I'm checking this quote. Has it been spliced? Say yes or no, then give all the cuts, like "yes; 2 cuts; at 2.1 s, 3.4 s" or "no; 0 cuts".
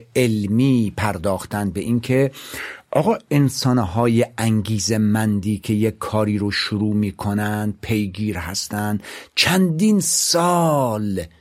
no; 0 cuts